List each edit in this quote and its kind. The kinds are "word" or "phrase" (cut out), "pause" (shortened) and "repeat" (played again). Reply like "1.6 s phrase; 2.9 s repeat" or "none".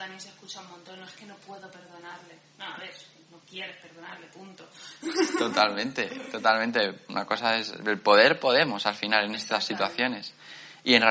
none